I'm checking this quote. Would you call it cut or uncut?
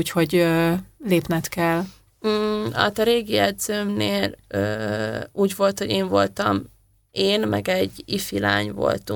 uncut